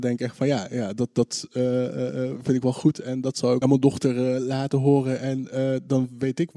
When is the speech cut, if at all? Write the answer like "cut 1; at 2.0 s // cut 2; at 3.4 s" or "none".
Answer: cut 1; at 3.6 s